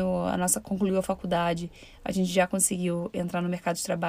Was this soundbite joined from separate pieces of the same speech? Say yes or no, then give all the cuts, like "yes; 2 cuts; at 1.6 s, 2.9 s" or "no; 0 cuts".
no; 0 cuts